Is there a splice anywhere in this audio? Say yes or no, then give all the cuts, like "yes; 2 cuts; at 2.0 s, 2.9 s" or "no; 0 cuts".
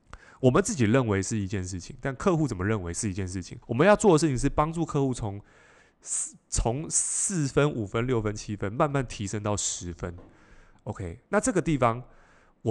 yes; 1 cut; at 3.6 s